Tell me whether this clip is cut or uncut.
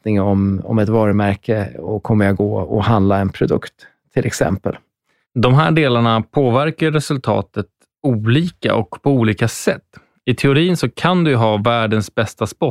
uncut